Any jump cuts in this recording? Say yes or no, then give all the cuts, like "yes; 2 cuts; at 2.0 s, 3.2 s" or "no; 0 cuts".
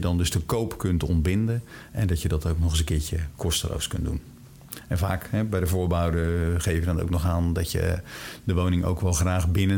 no; 0 cuts